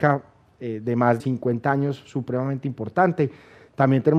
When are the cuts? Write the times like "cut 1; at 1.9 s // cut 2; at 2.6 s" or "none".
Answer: cut 1; at 1.2 s